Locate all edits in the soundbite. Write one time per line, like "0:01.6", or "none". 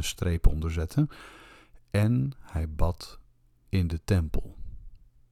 none

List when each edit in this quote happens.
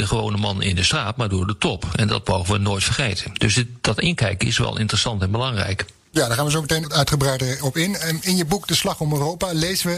0:06.8

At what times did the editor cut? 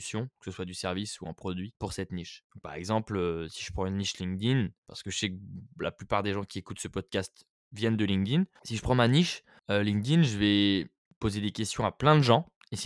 0:08.6

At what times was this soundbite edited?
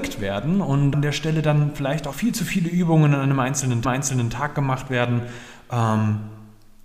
0:00.9
0:02.1
0:03.8

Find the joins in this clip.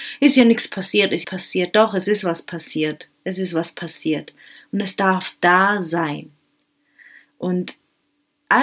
0:01.2

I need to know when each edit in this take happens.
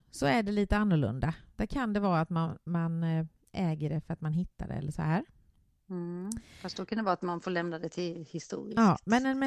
none

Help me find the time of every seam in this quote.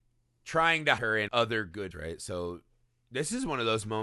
0:01.0
0:01.3
0:01.9

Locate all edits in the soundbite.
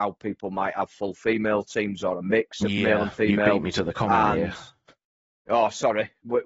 none

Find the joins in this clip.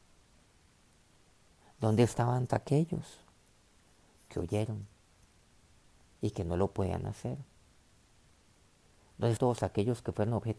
0:02.5
0:09.4

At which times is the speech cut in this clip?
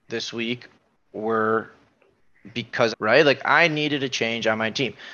0:02.9

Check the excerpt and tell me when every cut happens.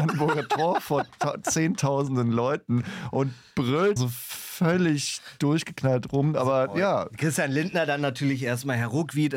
0:04.0

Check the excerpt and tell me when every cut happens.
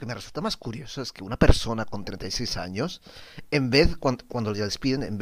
none

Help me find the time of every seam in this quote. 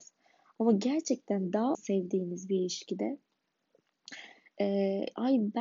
0:01.7

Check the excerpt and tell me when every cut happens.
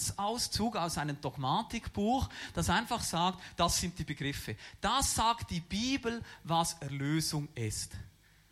none

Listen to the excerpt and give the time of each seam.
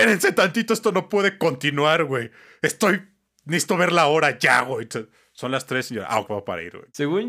0:06.3

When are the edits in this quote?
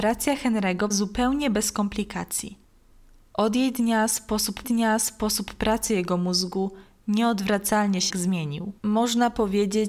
0:00.9
0:04.6
0:08.1
0:08.8

